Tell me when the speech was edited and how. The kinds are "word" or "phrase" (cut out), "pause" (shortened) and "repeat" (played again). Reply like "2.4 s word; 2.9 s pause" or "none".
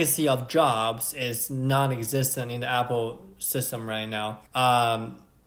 4.5 s pause